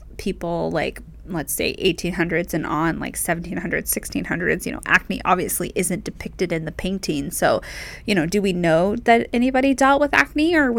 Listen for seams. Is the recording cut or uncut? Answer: uncut